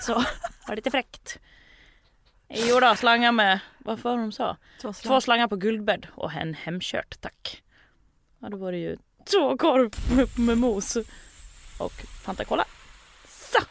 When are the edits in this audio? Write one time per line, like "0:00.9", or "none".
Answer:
0:03.0